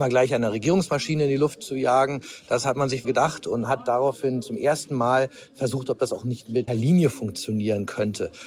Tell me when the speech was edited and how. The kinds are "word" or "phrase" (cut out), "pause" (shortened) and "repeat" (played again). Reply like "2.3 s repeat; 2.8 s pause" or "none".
3.0 s word; 6.7 s word